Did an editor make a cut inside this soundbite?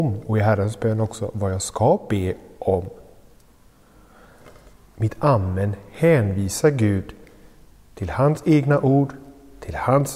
no; 0 cuts

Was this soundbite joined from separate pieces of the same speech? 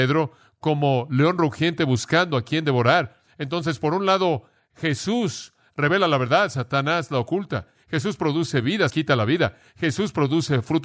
yes; 1 cut; at 8.9 s

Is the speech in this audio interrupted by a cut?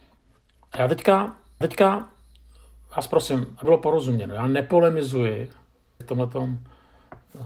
yes; 3 cuts; at 1.6 s, 3.6 s, 6.0 s

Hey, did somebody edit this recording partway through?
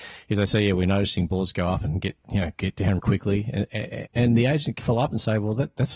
yes; 3 cuts; at 3.0 s, 4.1 s, 4.8 s

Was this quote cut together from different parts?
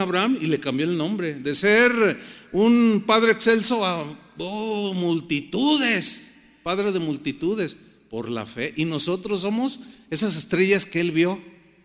no; 0 cuts

